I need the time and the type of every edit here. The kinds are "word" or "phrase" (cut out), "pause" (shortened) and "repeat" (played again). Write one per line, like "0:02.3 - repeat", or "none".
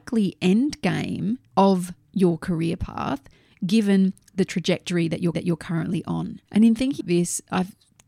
0:01.5 - pause
0:05.3 - repeat
0:06.4 - pause
0:07.0 - word